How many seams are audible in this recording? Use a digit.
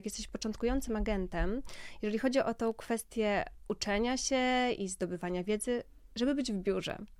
0